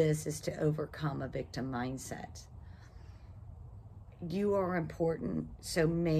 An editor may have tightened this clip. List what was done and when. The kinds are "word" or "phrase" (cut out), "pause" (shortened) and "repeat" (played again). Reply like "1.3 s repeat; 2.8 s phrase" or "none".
none

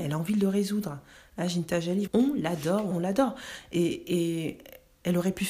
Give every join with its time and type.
2.1 s word; 2.9 s word

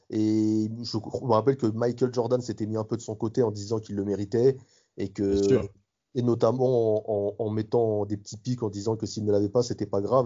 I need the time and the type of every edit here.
none

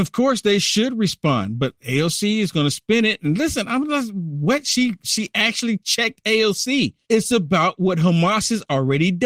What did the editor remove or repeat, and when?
7.0 s pause

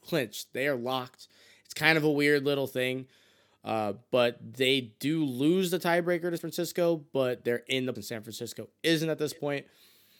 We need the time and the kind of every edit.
6.4 s word; 8.0 s word

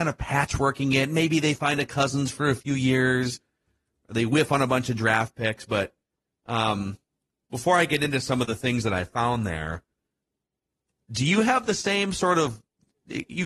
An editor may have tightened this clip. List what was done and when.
none

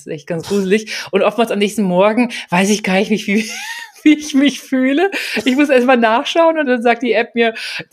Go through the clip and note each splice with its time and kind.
6.6 s word

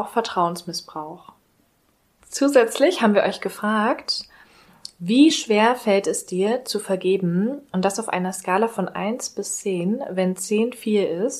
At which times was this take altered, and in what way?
none

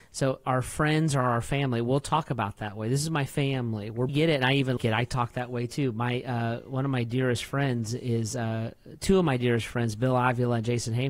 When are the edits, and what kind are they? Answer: 4.1 s phrase; 4.8 s word

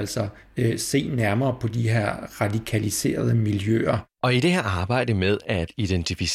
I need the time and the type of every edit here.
4.1 s pause

